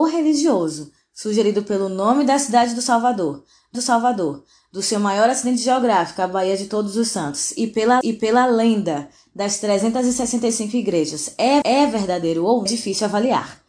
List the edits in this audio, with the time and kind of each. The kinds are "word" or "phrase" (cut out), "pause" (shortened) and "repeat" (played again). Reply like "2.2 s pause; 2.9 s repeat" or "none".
3.7 s repeat; 8.0 s repeat; 11.6 s repeat; 12.7 s phrase